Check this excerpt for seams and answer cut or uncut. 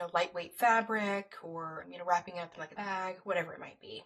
cut